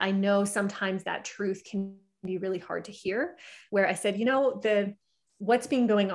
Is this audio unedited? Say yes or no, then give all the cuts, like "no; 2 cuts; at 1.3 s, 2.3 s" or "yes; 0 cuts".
yes; 0 cuts